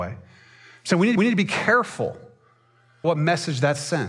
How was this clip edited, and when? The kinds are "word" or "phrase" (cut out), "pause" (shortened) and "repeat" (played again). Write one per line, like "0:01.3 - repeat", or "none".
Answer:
0:01.2 - repeat
0:03.0 - word